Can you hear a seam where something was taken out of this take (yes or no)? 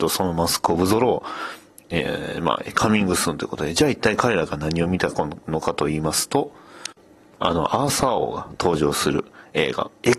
yes